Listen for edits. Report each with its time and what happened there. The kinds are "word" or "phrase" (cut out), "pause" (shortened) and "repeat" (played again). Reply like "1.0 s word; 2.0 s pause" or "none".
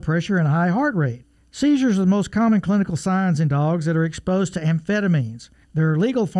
none